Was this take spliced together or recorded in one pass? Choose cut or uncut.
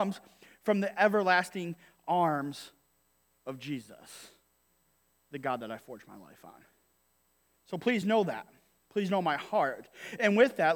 uncut